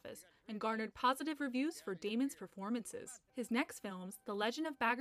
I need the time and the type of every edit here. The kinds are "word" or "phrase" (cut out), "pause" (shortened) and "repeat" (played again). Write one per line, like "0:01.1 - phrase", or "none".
0:03.3 - pause